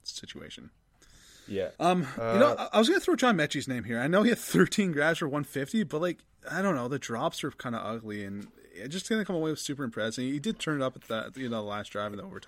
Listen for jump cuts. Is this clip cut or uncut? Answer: cut